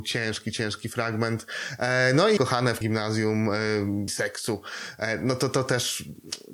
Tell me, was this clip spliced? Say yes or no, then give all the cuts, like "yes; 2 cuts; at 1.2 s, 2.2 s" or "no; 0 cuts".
yes; 3 cuts; at 2.4 s, 2.8 s, 4.1 s